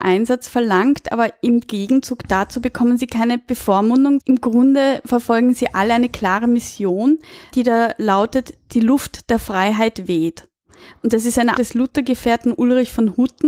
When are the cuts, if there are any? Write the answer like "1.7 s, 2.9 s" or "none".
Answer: 4.2 s, 7.5 s, 11.6 s